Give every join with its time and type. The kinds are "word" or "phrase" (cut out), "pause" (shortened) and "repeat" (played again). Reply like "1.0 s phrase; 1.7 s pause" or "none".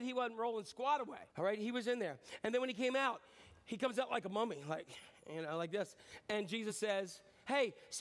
1.3 s pause